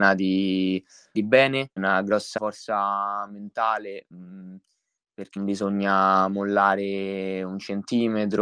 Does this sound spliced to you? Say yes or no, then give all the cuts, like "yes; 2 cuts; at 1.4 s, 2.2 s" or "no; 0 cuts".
yes; 4 cuts; at 1.1 s, 1.8 s, 2.4 s, 5.4 s